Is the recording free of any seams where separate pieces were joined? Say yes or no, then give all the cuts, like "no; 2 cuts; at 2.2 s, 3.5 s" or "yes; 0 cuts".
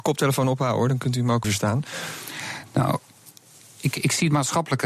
no; 1 cut; at 1.4 s